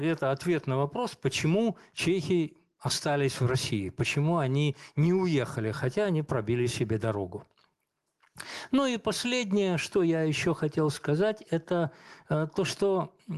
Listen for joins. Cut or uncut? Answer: uncut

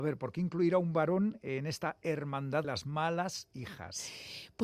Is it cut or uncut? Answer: cut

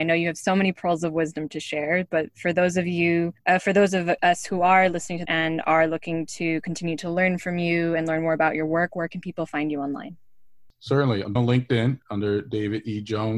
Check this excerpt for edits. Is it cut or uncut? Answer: cut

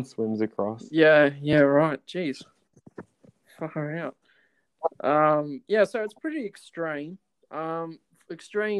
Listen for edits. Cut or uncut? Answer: uncut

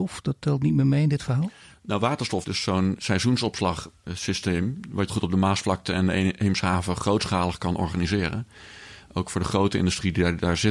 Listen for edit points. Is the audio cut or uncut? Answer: cut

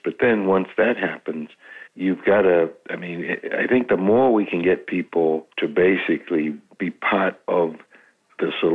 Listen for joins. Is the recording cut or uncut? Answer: cut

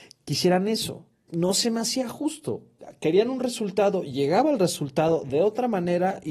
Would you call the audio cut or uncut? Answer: uncut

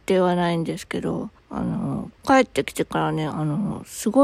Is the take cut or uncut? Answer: cut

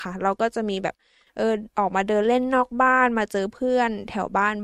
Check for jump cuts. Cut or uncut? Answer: uncut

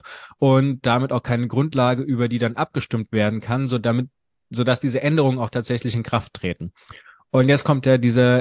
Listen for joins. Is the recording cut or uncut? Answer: uncut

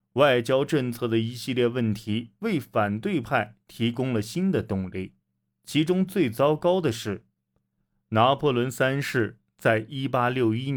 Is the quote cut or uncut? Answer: uncut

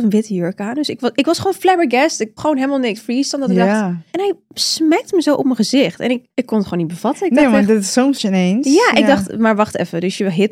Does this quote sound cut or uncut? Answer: cut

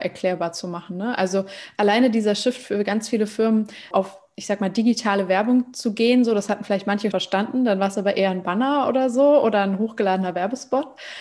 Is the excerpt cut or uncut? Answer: cut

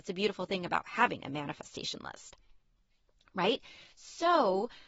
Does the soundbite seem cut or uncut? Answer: uncut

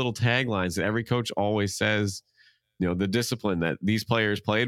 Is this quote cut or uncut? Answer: uncut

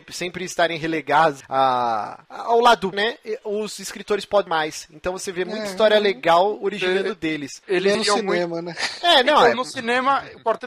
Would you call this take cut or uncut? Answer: cut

